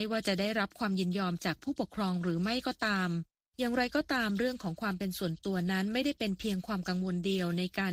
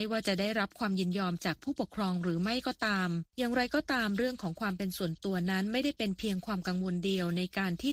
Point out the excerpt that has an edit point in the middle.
second; 1 cut; at 3.3 s

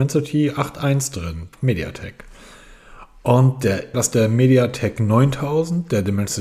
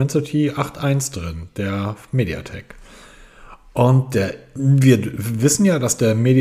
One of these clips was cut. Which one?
first; 2 cuts; at 1.5 s, 3.9 s

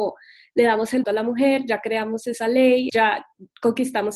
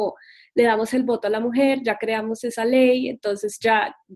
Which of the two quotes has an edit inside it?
first; 2 cuts; at 1.0 s, 2.9 s

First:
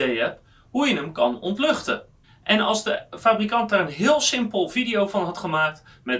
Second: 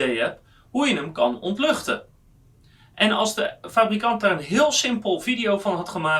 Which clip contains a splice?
first; 1 cut; at 2.2 s

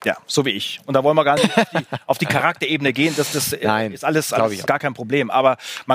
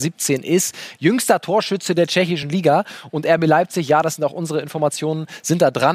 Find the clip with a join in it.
first; 2 cuts; at 1.4 s, 4.7 s

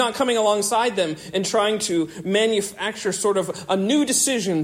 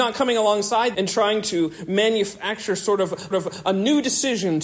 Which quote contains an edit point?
second; 2 cuts; at 0.9 s, 3.3 s

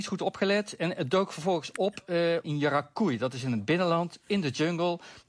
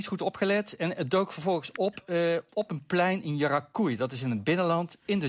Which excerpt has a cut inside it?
first; 1 cut; at 2.4 s

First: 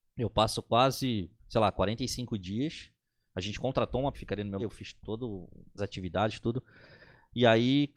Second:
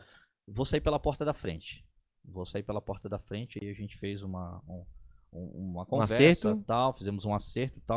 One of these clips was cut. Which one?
first; 4 cuts; at 1.4 s, 4.1 s, 4.6 s, 5.8 s

